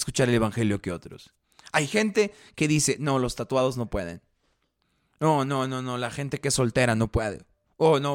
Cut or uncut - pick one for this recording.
uncut